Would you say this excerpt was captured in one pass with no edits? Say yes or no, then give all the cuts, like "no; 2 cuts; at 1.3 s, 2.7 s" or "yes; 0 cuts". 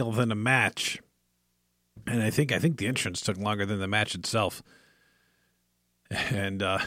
no; 1 cut; at 2.0 s